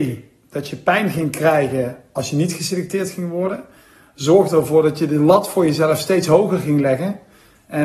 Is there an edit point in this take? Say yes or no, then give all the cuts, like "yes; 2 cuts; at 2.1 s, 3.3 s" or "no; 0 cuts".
no; 0 cuts